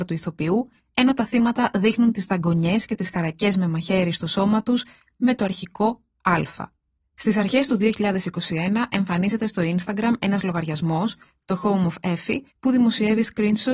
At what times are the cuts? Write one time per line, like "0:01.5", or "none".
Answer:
0:12.5